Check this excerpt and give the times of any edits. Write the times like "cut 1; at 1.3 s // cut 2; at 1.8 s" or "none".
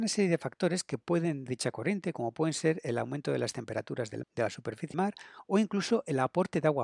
cut 1; at 1.5 s // cut 2; at 4.2 s // cut 3; at 4.9 s